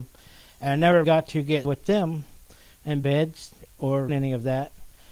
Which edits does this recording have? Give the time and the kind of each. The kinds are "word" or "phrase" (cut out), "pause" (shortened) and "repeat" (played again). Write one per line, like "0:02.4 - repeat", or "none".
0:01.0 - word
0:01.6 - word
0:03.0 - word
0:04.1 - word